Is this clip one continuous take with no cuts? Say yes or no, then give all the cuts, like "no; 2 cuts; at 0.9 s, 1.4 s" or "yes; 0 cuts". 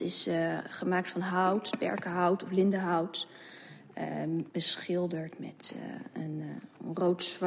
no; 1 cut; at 4.5 s